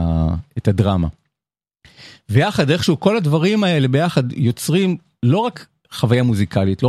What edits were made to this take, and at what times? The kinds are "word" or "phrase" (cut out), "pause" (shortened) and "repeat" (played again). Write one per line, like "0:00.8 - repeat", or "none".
none